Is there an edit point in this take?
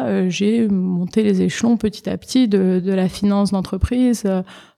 no; 0 cuts

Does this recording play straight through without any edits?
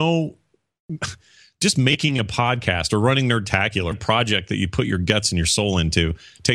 no; 1 cut; at 3.9 s

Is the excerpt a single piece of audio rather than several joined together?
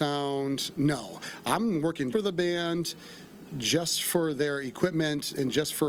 no; 1 cut; at 2.1 s

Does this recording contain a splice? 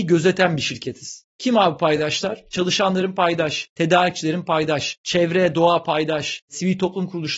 no; 0 cuts

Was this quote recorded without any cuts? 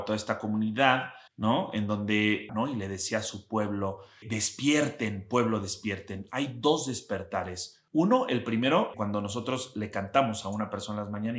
no; 5 cuts; at 1.3 s, 2.5 s, 4.2 s, 7.9 s, 8.9 s

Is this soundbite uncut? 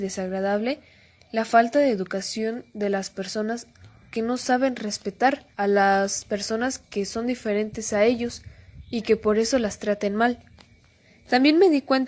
no; 1 cut; at 5.5 s

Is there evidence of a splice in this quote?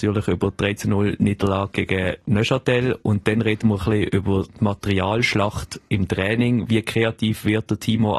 no; 0 cuts

